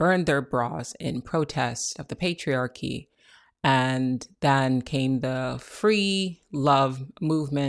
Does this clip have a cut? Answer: no; 0 cuts

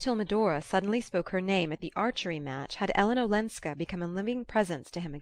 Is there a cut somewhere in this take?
no; 0 cuts

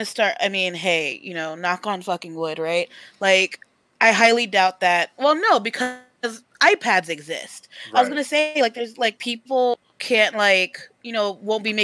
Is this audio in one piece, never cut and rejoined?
yes; 0 cuts

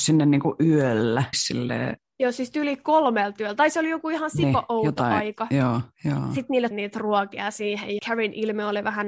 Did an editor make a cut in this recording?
yes; 4 cuts; at 1.3 s, 5.9 s, 6.7 s, 8.0 s

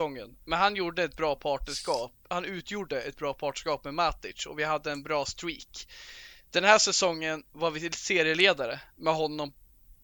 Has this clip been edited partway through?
no; 0 cuts

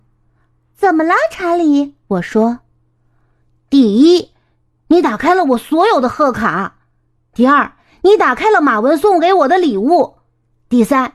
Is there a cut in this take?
yes; 1 cut; at 2.0 s

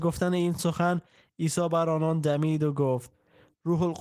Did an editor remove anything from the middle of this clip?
no; 0 cuts

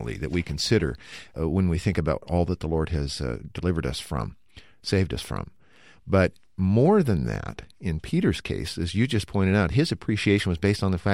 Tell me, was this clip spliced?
no; 0 cuts

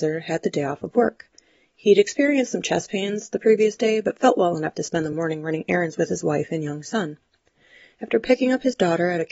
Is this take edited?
no; 0 cuts

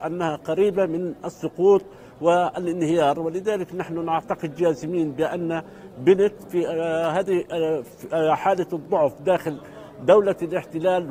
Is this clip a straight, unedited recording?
yes; 0 cuts

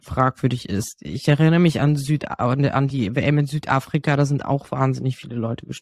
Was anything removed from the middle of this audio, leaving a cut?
no; 0 cuts

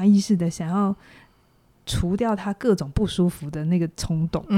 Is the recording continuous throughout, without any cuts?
yes; 0 cuts

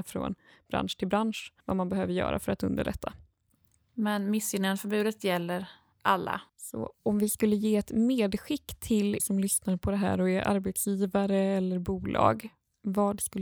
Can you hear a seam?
yes; 3 cuts; at 1.6 s, 6.5 s, 9.2 s

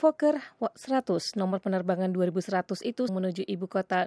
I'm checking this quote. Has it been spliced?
yes; 1 cut; at 3.1 s

